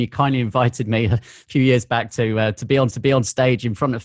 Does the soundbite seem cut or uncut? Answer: cut